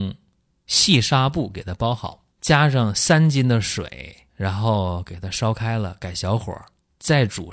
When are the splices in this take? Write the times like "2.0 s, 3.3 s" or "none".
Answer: 2.3 s, 4.3 s

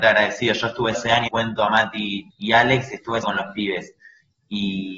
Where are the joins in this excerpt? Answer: 0.9 s, 1.3 s, 2.3 s, 3.2 s

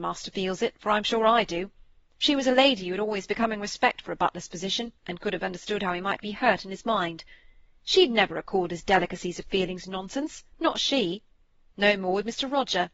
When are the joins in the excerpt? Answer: 5.0 s, 10.5 s

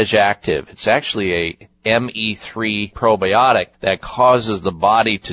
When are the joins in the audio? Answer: 2.9 s, 3.7 s

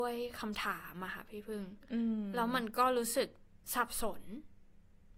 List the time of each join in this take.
3.6 s

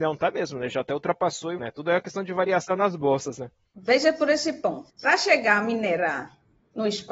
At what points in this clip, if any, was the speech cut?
1.6 s

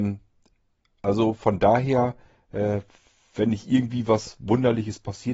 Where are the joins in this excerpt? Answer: none

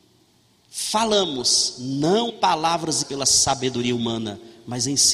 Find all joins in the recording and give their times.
2.3 s, 3.0 s

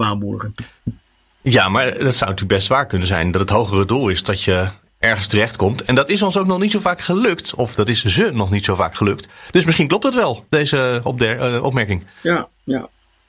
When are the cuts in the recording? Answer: none

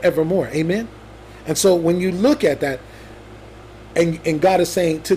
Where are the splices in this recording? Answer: none

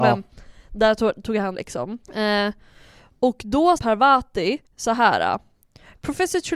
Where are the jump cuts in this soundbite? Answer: 1.5 s, 2.0 s, 3.8 s, 4.6 s

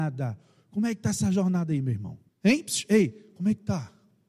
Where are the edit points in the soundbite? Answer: 2.3 s

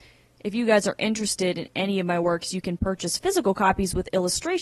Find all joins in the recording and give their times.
none

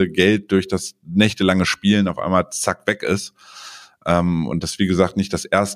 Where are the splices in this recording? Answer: none

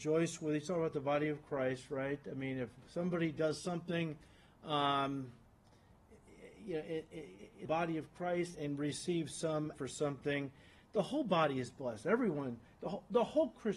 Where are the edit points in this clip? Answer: 7.7 s, 8.5 s, 9.7 s

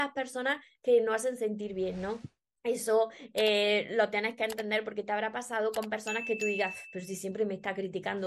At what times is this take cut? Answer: 2.5 s

